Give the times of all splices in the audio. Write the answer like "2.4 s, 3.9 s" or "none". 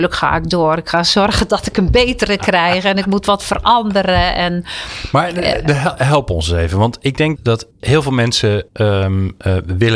7.4 s, 7.7 s, 8.7 s